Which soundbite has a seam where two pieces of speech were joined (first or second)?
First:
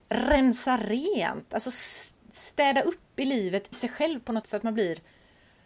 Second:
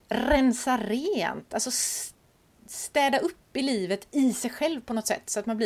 first